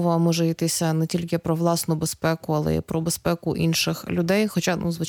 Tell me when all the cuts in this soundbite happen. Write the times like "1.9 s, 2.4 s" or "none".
none